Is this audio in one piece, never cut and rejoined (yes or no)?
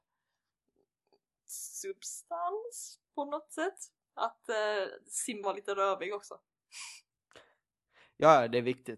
no